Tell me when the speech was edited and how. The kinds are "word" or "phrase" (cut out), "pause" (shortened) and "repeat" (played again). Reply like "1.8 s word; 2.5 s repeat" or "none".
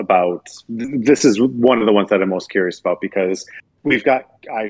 none